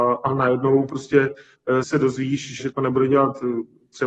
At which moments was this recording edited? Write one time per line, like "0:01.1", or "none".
0:01.8
0:02.6